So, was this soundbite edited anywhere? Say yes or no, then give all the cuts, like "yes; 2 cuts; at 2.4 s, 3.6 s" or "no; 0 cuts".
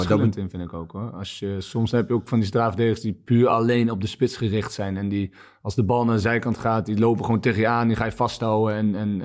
no; 0 cuts